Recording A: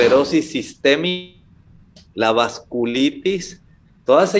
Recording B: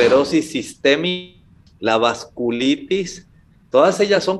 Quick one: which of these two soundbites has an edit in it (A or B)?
B